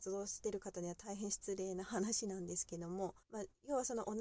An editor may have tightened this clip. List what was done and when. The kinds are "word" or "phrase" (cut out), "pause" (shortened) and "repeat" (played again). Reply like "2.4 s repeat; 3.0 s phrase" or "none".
3.2 s pause

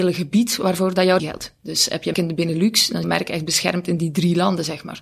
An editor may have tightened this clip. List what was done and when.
1.2 s word; 2.1 s word; 3.0 s word

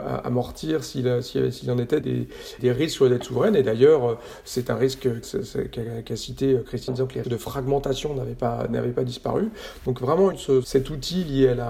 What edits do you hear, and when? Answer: 2.0 s word; 2.6 s word; 5.2 s word; 6.9 s word; 7.2 s word; 10.3 s phrase; 10.6 s word

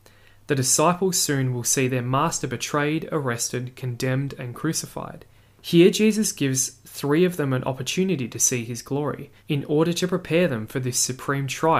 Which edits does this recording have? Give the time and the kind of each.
5.4 s pause; 9.4 s pause

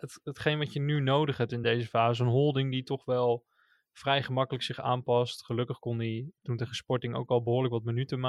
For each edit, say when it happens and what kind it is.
none

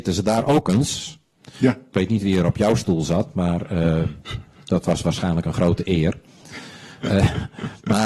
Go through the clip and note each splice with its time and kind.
none

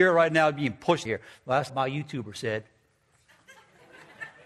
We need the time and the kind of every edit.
1.1 s phrase; 1.7 s phrase

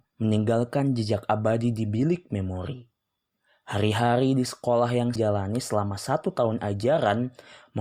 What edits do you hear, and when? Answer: 5.2 s word

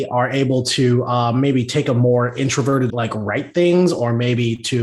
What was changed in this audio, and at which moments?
2.9 s phrase

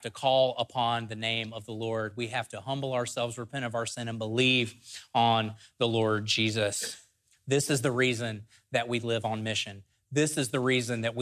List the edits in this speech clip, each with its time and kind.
none

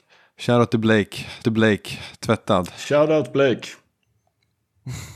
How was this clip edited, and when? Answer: 1.4 s repeat

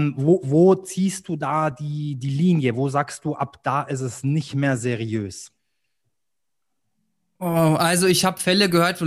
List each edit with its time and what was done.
none

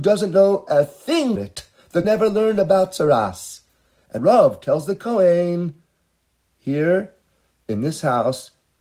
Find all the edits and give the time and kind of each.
1.4 s word; 2.0 s word; 4.2 s word

